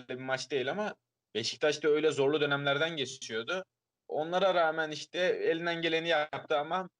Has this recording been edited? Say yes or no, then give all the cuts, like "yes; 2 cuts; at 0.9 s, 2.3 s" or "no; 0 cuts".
no; 0 cuts